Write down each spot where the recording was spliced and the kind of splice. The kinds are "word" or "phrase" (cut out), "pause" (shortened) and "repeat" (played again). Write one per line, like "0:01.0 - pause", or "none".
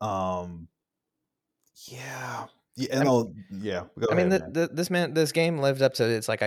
none